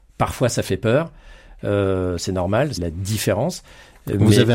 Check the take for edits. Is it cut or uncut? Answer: cut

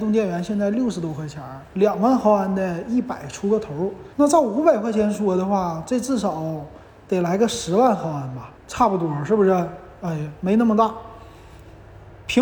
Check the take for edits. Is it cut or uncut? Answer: cut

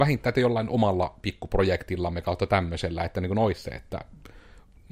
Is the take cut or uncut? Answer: uncut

